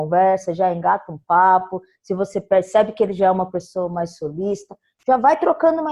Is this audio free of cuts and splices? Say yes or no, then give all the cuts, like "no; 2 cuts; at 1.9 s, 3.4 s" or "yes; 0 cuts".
yes; 0 cuts